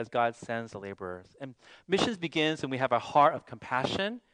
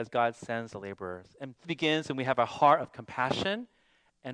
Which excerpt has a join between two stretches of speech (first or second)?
second